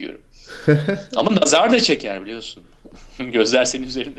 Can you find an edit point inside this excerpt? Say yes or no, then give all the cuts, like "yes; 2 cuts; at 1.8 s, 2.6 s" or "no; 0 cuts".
no; 0 cuts